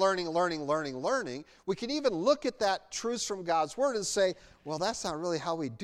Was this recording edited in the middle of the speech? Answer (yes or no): no